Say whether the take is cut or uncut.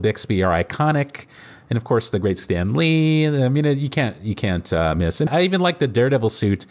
cut